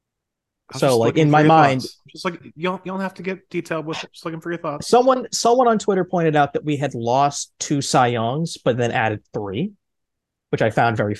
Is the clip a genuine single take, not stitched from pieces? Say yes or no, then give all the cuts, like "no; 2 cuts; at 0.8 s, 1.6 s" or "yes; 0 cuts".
yes; 0 cuts